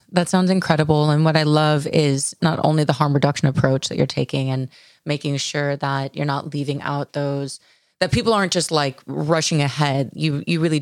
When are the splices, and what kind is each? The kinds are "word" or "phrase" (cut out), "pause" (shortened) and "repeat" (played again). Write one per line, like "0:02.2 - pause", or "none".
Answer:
none